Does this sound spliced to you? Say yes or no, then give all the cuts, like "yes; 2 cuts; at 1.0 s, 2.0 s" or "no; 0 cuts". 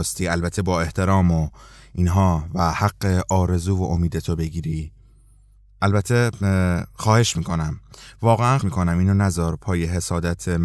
yes; 1 cut; at 8.6 s